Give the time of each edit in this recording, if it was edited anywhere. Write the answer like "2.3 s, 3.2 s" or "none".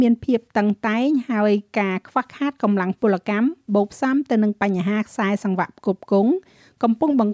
none